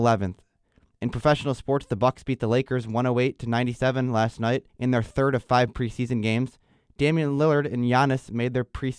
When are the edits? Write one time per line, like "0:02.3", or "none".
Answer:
0:04.7